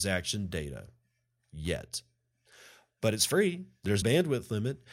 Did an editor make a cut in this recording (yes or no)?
yes